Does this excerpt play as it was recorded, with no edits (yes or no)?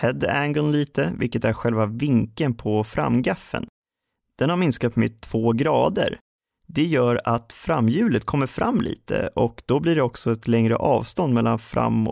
yes